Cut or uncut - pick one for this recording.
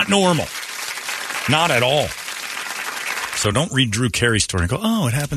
uncut